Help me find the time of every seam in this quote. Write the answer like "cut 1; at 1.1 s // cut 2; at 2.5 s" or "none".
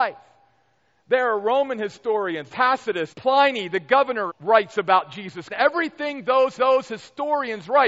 cut 1; at 2.5 s // cut 2; at 3.1 s // cut 3; at 4.3 s // cut 4; at 5.5 s // cut 5; at 6.6 s